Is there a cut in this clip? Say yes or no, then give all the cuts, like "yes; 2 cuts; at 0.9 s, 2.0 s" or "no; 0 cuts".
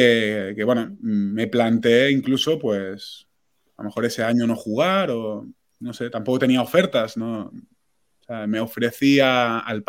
no; 0 cuts